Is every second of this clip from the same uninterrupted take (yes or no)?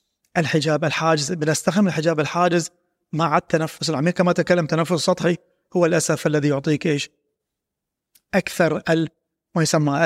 yes